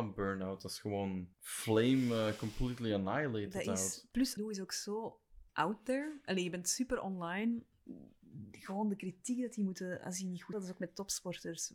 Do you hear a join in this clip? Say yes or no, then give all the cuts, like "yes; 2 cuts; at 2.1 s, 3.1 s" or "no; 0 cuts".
yes; 4 cuts; at 1.3 s, 4.4 s, 5.5 s, 10.5 s